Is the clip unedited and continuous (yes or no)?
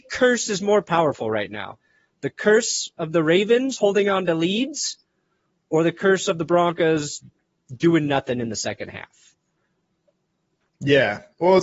yes